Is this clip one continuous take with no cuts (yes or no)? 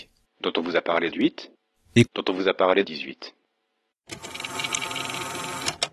no